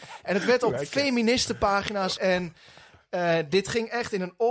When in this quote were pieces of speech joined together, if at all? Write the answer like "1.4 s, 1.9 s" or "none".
2.2 s